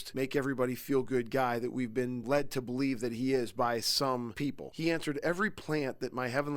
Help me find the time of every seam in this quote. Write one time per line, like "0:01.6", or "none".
none